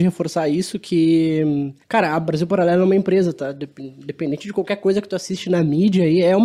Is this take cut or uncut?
cut